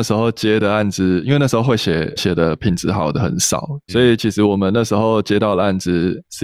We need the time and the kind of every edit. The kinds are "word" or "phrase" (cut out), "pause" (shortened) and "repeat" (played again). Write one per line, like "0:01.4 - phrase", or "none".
0:02.2 - word
0:03.9 - phrase